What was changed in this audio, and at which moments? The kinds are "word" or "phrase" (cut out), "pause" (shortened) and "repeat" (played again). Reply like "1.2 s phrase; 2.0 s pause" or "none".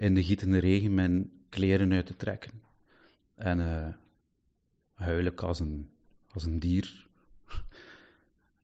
none